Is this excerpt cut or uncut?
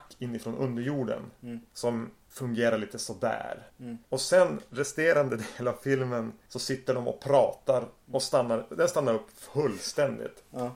uncut